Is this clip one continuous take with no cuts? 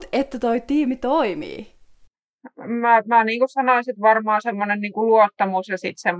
yes; 0 cuts

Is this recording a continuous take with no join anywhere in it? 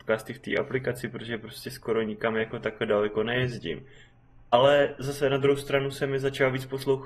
yes; 0 cuts

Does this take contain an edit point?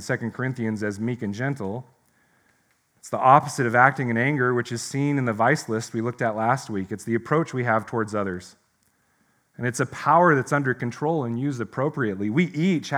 no; 0 cuts

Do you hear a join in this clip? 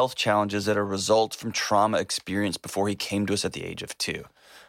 no; 0 cuts

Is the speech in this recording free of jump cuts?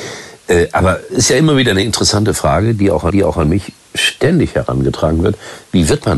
no; 2 cuts; at 1.1 s, 3.1 s

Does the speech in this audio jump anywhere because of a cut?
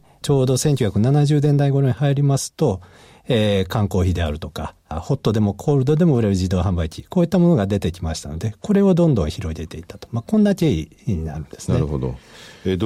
no; 0 cuts

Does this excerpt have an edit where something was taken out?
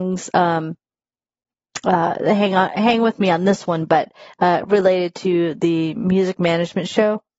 no; 0 cuts

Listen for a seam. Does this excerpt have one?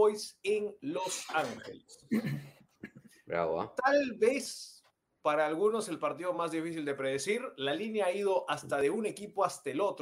no; 0 cuts

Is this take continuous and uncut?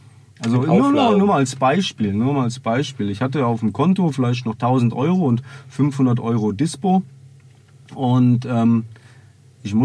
yes; 0 cuts

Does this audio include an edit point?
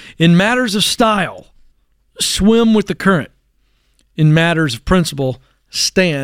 no; 0 cuts

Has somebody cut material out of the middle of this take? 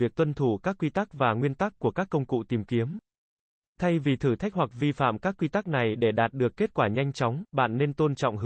no; 0 cuts

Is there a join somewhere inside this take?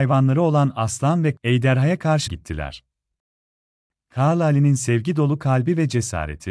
yes; 2 cuts; at 1.4 s, 2.3 s

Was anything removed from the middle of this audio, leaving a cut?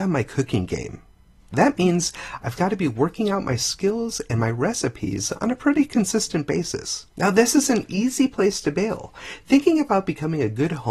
yes; 1 cut; at 7.1 s

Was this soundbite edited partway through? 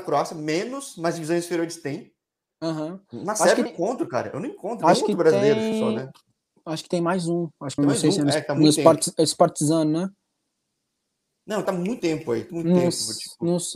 yes; 5 cuts; at 3.7 s, 7.8 s, 11.7 s, 12.0 s, 12.5 s

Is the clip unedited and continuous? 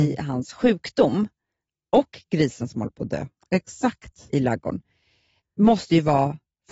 yes; 0 cuts

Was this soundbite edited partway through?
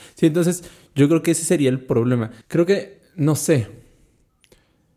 yes; 2 cuts; at 2.4 s, 3.1 s

